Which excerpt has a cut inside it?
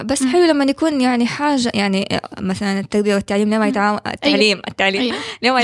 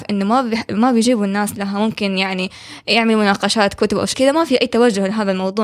second; 1 cut; at 4.1 s

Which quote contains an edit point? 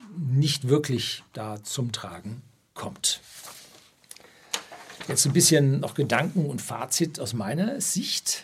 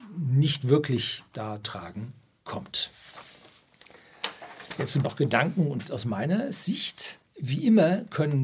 second; 4 cuts; at 1.6 s, 5.0 s, 5.8 s, 7.2 s

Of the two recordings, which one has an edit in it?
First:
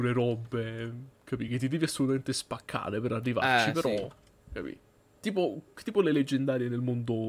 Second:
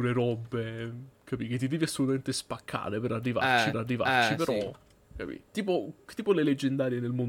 second; 2 cuts; at 3.7 s, 5.5 s

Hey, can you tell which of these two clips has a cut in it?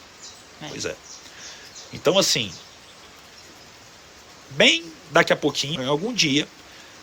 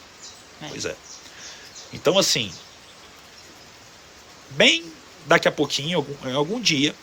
first; 2 cuts; at 5.0 s, 5.8 s

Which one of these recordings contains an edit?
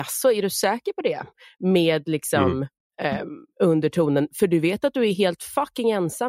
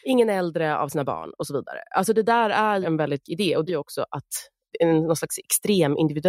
second; 4 cuts; at 2.8 s, 3.2 s, 3.7 s, 4.7 s

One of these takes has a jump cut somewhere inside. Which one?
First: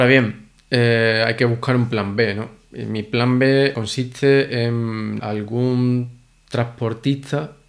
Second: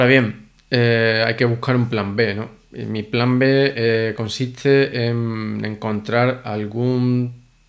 first; 2 cuts; at 3.7 s, 5.2 s

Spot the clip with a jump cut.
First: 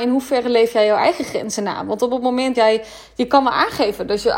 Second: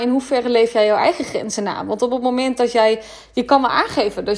first; 1 cut; at 2.5 s

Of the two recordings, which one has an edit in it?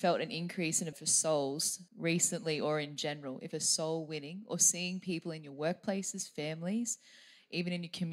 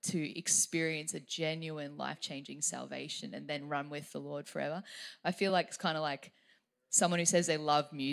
first; 3 cuts; at 0.9 s, 1.9 s, 3.5 s

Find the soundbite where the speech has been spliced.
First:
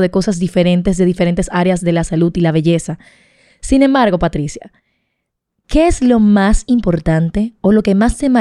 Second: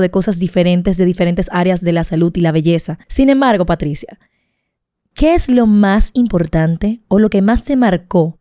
second; 1 cut; at 3.0 s

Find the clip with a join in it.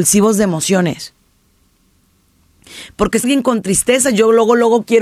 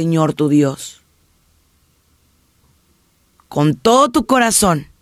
first; 1 cut; at 3.2 s

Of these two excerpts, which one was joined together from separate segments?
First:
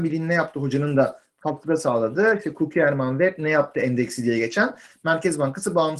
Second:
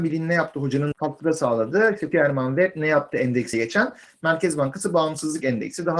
second; 3 cuts; at 0.9 s, 2.1 s, 3.5 s

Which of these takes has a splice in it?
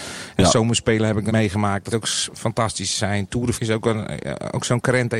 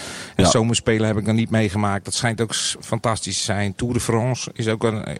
first; 3 cuts; at 1.3 s, 1.9 s, 3.5 s

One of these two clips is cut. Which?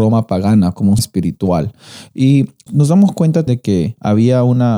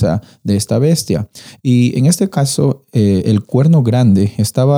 first; 3 cuts; at 1.0 s, 2.7 s, 3.5 s

